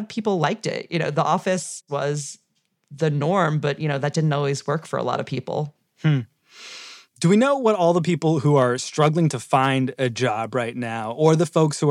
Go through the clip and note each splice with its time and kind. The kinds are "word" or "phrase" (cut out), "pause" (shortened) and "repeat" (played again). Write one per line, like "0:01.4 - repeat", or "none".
none